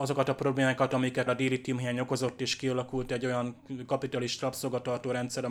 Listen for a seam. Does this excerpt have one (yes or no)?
yes